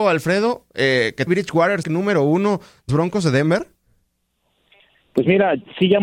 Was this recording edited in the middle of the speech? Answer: yes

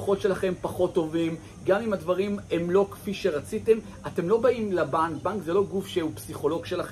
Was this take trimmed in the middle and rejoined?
no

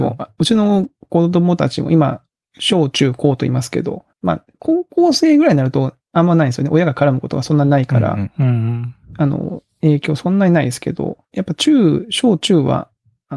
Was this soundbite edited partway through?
yes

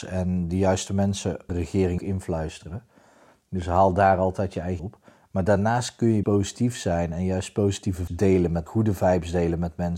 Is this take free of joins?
no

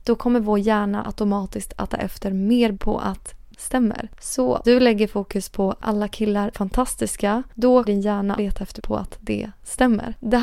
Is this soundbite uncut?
no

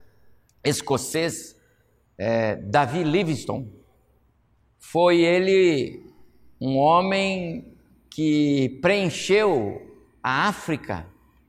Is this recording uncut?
yes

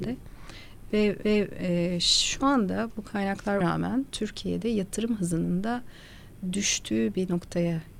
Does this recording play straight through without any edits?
no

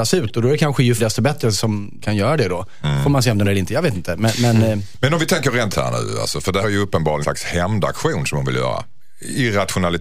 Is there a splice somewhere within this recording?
yes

